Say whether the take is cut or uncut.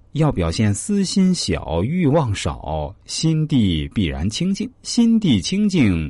cut